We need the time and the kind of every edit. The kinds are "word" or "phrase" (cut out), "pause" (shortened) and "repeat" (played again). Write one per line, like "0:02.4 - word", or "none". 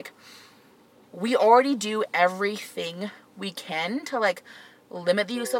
none